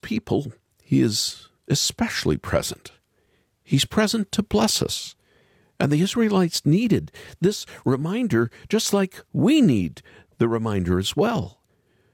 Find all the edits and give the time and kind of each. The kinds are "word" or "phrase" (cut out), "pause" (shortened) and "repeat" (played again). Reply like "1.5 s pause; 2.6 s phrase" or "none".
none